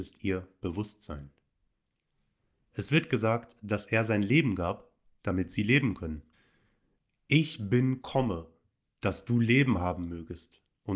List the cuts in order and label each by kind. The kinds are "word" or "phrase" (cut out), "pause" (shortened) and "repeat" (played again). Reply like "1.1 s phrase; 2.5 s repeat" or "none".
none